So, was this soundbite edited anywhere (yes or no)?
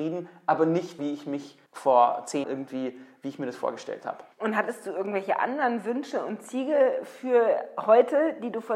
yes